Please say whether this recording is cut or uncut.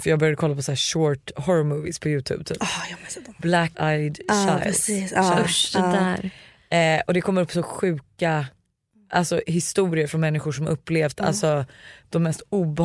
cut